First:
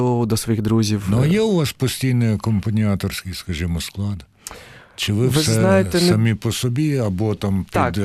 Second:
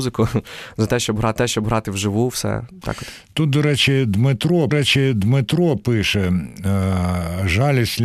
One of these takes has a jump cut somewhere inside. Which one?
second; 3 cuts; at 1.4 s, 2.8 s, 4.7 s

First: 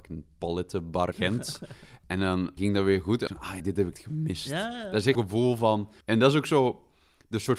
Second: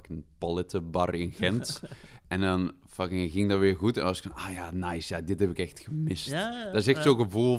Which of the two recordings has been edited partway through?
first; 7 cuts; at 1.1 s, 2.6 s, 3.3 s, 3.6 s, 3.9 s, 5.1 s, 6.0 s

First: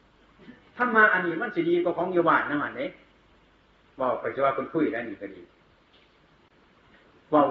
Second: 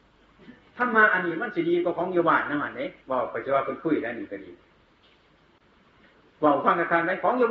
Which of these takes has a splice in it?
second; 1 cut; at 3.0 s

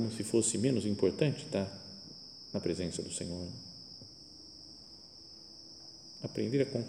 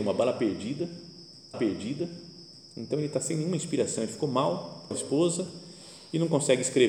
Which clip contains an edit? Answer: second; 2 cuts; at 1.5 s, 4.9 s

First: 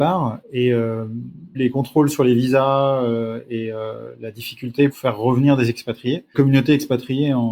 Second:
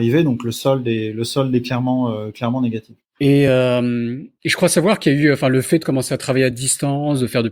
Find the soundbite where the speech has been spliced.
first; 3 cuts; at 1.5 s, 4.9 s, 6.3 s

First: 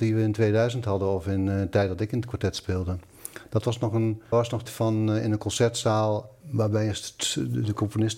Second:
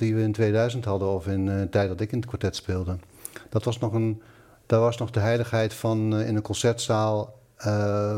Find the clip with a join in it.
first; 3 cuts; at 4.3 s, 4.7 s, 6.4 s

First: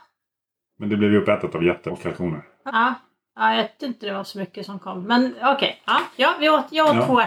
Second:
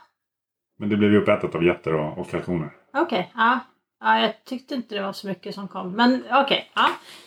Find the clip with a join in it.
first; 4 cuts; at 1.9 s, 2.7 s, 3.8 s, 6.1 s

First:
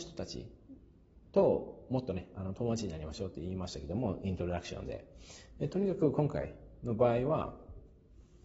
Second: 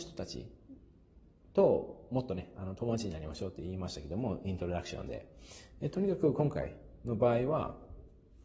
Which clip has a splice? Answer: first; 1 cut; at 1.3 s

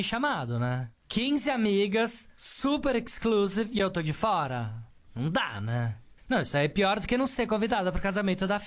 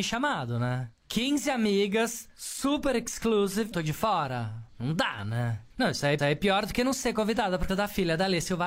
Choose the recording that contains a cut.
second; 5 cuts; at 3.7 s, 4.7 s, 5.7 s, 6.2 s, 7.7 s

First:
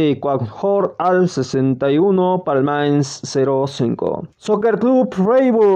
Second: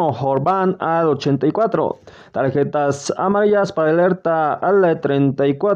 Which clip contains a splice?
first; 1 cut; at 4.3 s

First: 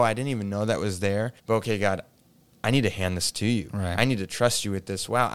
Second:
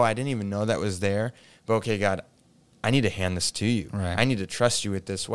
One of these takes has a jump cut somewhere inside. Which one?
first; 1 cut; at 1.4 s

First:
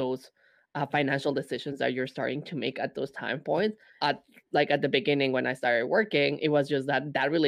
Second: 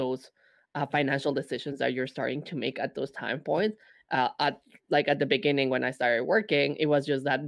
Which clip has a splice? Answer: first; 1 cut; at 4.0 s

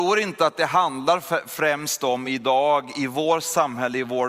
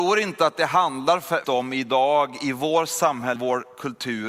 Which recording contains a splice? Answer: second; 2 cuts; at 1.4 s, 3.4 s

